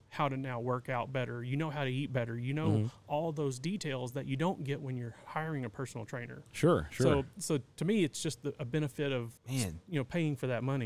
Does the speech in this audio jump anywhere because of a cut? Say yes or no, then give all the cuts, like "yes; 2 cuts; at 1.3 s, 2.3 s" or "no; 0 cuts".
yes; 1 cut; at 9.4 s